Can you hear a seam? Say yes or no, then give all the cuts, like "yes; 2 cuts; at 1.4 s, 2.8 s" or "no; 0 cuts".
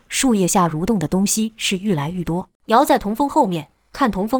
yes; 1 cut; at 2.5 s